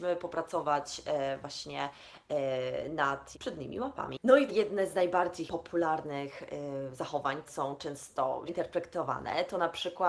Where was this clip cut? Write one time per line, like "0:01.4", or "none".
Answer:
0:03.3
0:04.5
0:05.5
0:07.5
0:08.5